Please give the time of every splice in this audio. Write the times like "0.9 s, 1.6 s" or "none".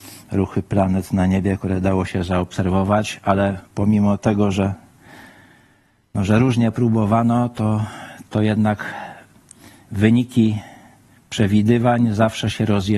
3.7 s